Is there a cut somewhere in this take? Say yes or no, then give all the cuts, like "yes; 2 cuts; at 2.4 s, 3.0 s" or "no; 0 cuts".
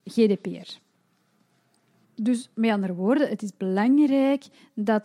yes; 1 cut; at 2.5 s